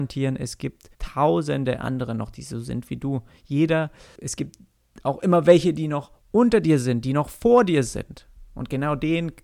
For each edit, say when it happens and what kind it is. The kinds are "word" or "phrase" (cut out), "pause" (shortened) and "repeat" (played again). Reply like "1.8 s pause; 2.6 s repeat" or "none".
0.9 s pause; 4.2 s word; 6.2 s pause